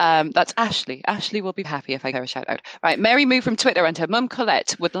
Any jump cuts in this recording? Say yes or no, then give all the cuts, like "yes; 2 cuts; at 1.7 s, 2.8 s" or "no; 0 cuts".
yes; 2 cuts; at 1.6 s, 2.1 s